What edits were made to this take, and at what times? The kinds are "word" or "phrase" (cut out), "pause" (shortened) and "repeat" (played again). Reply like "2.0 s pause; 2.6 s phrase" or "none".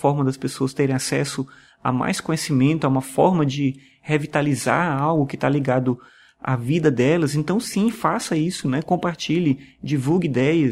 none